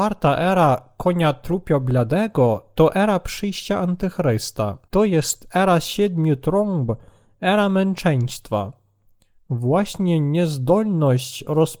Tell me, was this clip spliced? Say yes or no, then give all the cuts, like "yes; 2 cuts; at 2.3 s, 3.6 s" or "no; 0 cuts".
yes; 1 cut; at 4.8 s